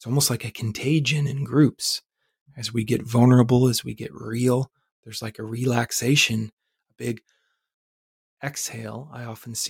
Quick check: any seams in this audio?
no; 0 cuts

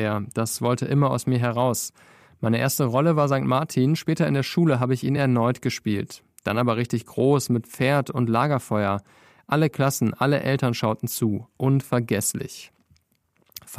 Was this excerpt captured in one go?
yes; 0 cuts

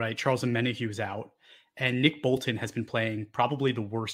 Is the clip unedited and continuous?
yes; 0 cuts

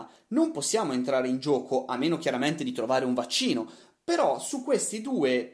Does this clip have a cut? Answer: no; 0 cuts

